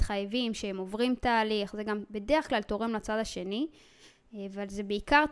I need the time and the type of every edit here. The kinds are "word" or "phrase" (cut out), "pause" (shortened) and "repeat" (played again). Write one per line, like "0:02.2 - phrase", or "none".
none